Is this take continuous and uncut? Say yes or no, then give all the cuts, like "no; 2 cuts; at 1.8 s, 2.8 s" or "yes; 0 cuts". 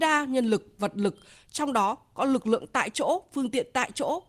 yes; 0 cuts